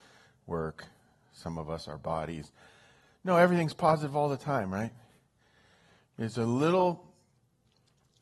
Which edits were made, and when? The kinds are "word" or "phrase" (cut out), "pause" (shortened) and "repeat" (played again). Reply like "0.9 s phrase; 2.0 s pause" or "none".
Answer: none